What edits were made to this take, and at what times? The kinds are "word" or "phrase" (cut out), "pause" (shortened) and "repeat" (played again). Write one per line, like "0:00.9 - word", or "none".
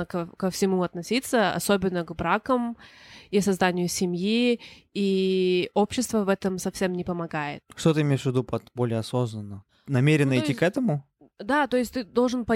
none